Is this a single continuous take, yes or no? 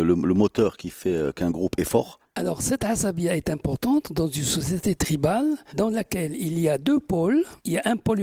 yes